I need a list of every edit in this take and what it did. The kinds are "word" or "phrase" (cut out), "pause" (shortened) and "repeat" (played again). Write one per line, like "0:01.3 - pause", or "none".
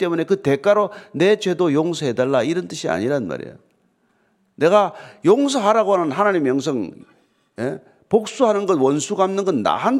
none